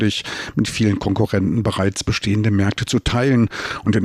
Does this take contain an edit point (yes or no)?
no